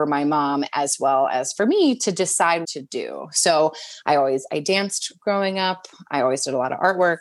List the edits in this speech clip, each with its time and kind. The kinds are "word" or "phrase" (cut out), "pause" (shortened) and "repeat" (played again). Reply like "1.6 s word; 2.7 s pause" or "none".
2.6 s phrase